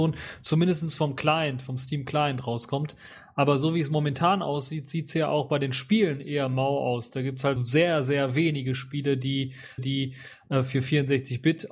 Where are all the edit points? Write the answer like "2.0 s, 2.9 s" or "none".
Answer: 7.6 s, 9.8 s